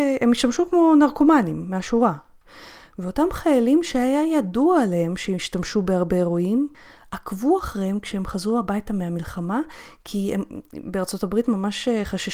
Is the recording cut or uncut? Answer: uncut